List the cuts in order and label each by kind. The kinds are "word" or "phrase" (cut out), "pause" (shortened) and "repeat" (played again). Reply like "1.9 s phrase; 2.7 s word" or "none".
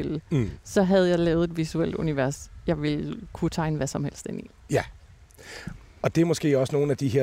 none